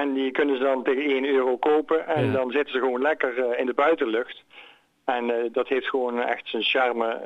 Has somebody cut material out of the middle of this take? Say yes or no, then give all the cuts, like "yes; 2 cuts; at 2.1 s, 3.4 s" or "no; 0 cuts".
no; 0 cuts